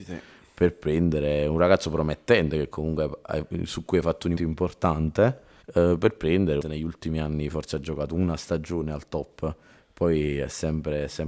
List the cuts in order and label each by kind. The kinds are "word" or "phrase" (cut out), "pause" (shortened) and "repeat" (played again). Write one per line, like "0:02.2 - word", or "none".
0:04.4 - word
0:05.6 - pause
0:06.6 - phrase